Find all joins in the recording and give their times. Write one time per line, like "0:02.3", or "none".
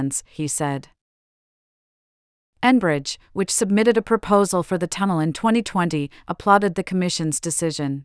none